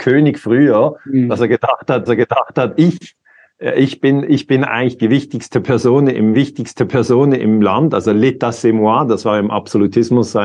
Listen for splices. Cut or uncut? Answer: cut